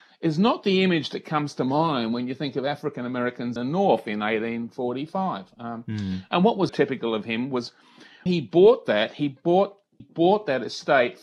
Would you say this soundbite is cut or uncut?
cut